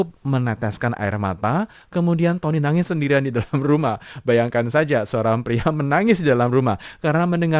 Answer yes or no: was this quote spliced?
no